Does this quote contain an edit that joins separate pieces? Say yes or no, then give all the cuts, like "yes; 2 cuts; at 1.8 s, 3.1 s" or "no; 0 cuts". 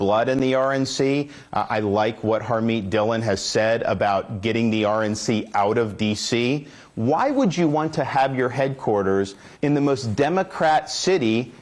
yes; 1 cut; at 9.5 s